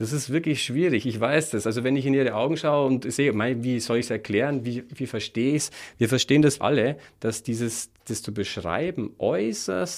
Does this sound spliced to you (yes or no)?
yes